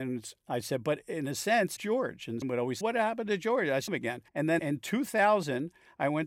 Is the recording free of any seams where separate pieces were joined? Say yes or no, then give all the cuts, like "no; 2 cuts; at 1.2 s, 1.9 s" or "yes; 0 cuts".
no; 6 cuts; at 1.8 s, 2.4 s, 2.8 s, 3.9 s, 4.3 s, 4.6 s